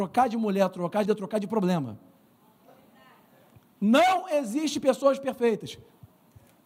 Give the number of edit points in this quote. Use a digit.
1